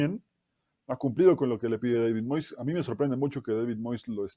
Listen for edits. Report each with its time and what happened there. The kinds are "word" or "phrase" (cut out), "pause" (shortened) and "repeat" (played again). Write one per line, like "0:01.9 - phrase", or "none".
none